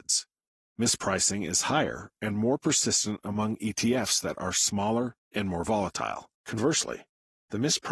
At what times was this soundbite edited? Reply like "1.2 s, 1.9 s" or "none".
6.3 s